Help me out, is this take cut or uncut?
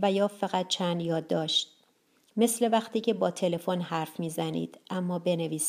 uncut